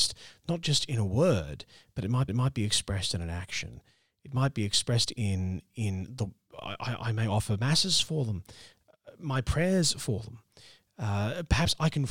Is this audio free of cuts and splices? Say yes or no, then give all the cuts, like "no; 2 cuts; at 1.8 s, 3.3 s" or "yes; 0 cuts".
no; 1 cut; at 2.3 s